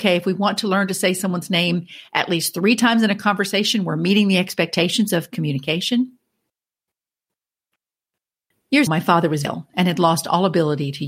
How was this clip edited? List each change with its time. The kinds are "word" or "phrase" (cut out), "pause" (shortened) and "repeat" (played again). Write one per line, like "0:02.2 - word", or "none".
0:08.9 - word
0:09.4 - word